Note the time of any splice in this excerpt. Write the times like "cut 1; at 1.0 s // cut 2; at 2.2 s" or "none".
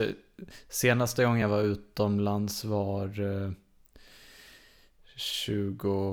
none